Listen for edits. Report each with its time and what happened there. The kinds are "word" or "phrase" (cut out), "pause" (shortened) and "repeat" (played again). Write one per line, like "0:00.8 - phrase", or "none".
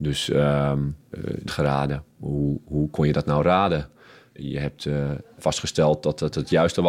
0:01.5 - phrase